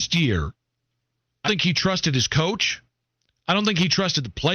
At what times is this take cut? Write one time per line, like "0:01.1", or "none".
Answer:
0:01.4